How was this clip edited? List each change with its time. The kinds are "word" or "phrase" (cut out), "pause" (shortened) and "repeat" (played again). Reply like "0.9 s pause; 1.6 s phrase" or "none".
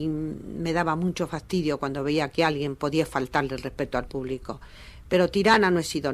none